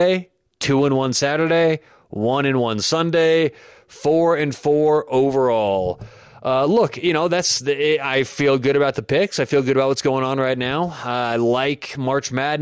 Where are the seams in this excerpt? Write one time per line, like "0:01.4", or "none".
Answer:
none